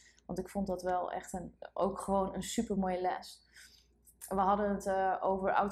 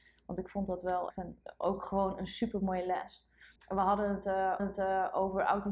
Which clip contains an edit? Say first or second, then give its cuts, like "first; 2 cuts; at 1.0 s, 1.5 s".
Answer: second; 3 cuts; at 1.1 s, 3.6 s, 4.6 s